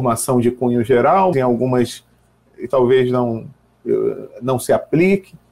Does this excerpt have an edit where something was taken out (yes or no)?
yes